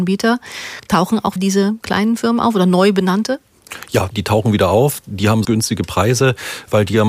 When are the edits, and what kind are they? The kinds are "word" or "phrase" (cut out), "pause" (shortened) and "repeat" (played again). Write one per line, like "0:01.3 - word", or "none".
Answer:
0:01.4 - word
0:04.1 - word
0:05.4 - word